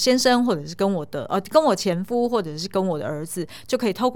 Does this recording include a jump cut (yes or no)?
no